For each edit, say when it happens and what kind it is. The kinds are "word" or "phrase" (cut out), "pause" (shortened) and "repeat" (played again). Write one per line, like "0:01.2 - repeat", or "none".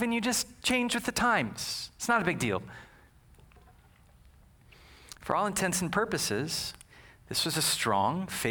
none